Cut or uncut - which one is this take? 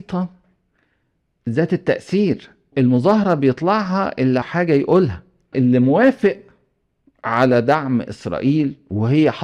cut